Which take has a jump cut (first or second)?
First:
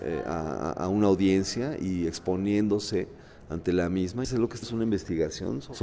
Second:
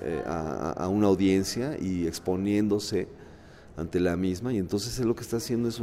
first